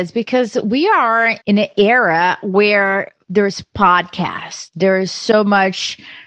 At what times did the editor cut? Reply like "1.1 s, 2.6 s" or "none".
3.2 s